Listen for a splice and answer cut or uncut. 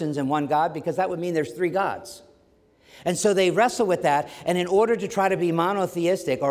uncut